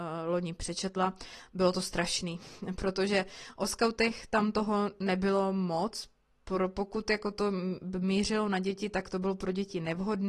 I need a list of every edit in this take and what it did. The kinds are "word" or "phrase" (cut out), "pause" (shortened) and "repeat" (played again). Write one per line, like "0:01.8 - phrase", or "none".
none